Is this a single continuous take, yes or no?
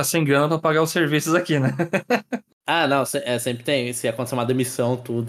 yes